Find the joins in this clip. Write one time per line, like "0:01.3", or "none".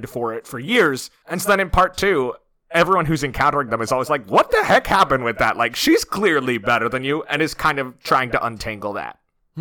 none